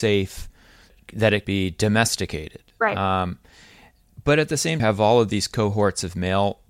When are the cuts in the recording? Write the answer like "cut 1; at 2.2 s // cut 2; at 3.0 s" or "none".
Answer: cut 1; at 1.4 s // cut 2; at 4.8 s